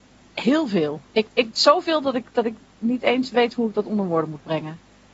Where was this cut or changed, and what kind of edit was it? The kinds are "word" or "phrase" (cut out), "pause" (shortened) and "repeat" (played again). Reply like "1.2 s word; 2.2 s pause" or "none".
1.1 s pause